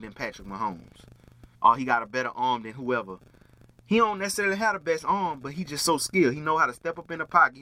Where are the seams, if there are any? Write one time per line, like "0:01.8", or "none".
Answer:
0:01.5